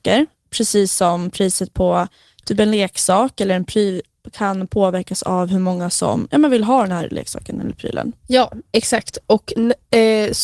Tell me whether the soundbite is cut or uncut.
uncut